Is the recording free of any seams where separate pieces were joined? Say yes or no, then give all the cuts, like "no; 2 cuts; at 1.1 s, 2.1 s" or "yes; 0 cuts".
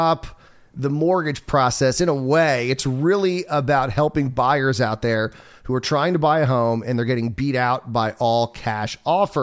yes; 0 cuts